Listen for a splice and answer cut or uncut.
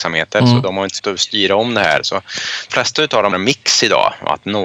cut